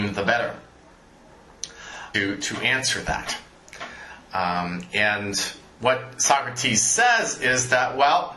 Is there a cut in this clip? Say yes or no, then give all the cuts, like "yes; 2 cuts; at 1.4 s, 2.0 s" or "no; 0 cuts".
yes; 1 cut; at 2.1 s